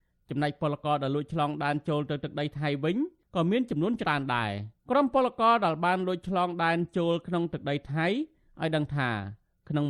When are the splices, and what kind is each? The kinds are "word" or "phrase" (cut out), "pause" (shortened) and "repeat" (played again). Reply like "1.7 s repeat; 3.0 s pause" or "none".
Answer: 4.8 s pause